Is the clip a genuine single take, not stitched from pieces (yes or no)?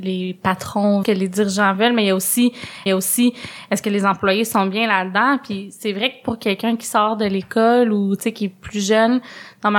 no